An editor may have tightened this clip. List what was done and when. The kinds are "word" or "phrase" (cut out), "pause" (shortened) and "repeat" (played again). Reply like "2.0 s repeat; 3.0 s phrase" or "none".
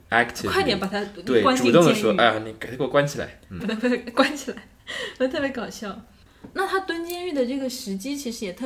3.6 s word